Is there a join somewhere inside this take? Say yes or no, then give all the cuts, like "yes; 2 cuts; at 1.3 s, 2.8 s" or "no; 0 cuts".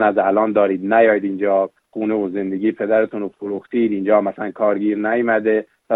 no; 0 cuts